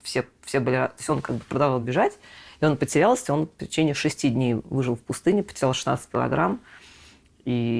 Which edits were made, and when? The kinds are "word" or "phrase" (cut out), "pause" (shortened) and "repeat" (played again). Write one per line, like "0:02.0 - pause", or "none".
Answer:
none